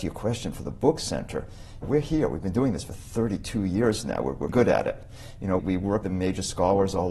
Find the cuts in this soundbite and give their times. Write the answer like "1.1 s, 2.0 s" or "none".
1.8 s, 4.5 s, 5.6 s, 6.0 s